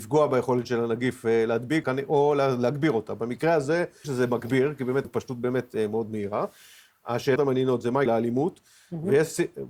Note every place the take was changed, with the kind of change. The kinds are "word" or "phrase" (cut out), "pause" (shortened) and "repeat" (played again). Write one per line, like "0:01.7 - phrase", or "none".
0:01.8 - word
0:04.0 - phrase
0:05.0 - phrase
0:07.4 - phrase
0:08.1 - word